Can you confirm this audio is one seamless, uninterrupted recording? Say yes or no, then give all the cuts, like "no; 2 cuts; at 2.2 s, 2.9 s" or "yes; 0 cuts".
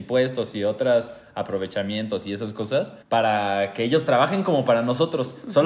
no; 1 cut; at 3.0 s